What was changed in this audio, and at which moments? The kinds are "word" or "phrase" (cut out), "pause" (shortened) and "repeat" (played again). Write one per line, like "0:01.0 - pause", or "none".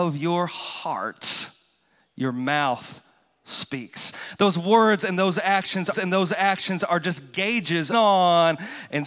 0:05.9 - repeat
0:07.9 - phrase